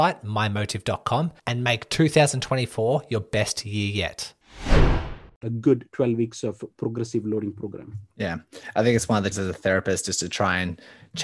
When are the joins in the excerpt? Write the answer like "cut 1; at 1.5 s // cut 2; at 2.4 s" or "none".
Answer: cut 1; at 1.4 s // cut 2; at 5.3 s // cut 3; at 8.1 s // cut 4; at 9.3 s